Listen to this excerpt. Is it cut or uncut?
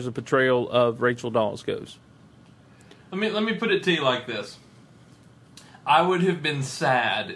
uncut